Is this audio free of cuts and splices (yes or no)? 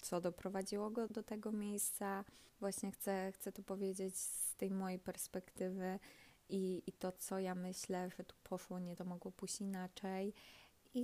no